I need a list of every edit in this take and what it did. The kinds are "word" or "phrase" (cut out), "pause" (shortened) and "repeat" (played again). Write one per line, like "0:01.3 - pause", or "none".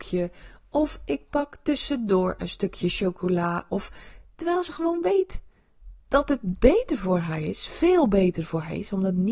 0:06.0 - pause